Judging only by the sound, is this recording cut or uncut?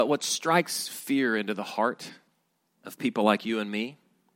uncut